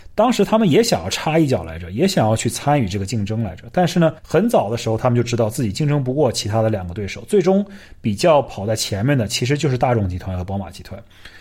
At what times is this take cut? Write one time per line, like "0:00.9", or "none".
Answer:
0:04.2